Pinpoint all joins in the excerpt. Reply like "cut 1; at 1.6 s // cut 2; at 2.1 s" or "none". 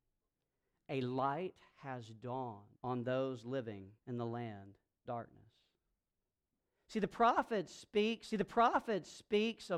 cut 1; at 2.7 s // cut 2; at 4.0 s // cut 3; at 5.0 s // cut 4; at 8.3 s